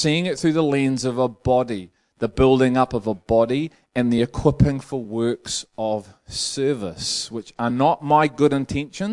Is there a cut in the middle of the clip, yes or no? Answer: no